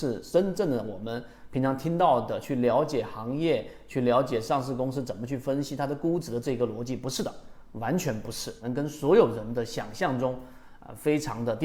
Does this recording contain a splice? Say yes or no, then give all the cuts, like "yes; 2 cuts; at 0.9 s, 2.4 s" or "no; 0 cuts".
no; 0 cuts